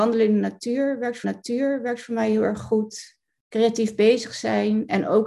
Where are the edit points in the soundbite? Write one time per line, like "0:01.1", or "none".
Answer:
0:01.2
0:03.4